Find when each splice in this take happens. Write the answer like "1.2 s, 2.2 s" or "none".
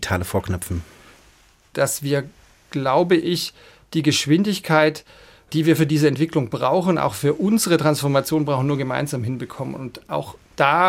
none